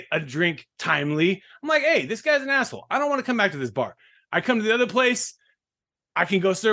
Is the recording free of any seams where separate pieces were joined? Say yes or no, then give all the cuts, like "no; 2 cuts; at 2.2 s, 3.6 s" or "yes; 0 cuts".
yes; 0 cuts